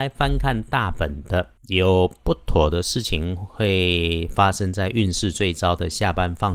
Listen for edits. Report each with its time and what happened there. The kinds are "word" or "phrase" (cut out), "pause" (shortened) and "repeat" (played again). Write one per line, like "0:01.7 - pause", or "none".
0:01.6 - pause